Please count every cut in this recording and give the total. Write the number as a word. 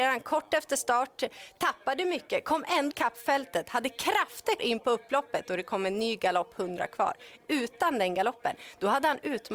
two